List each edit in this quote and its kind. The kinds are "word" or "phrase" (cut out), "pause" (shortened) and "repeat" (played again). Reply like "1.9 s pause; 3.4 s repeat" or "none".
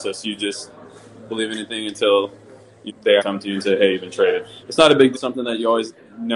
1.3 s word; 2.9 s word; 3.2 s word; 4.6 s word; 5.1 s word

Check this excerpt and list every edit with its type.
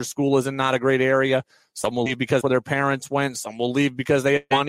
2.4 s word

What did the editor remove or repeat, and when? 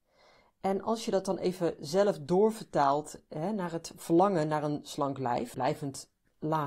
5.5 s word

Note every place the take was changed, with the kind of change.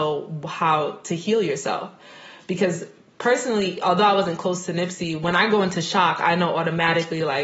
none

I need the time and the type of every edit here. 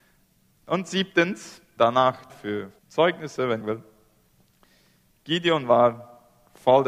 1.8 s word; 2.3 s phrase; 2.8 s pause; 3.6 s phrase

